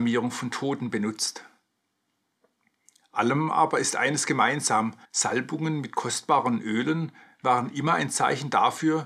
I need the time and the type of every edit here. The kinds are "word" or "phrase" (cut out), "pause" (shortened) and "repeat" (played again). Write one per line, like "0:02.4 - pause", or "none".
0:05.0 - pause